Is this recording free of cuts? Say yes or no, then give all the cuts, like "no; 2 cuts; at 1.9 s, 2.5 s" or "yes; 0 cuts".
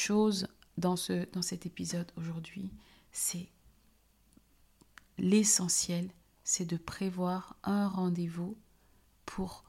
yes; 0 cuts